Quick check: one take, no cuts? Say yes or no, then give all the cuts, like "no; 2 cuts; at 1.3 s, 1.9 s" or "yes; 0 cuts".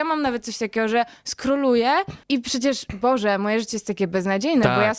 no; 1 cut; at 2.2 s